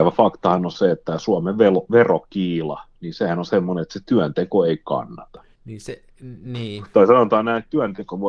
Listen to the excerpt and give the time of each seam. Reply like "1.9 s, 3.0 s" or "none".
5.5 s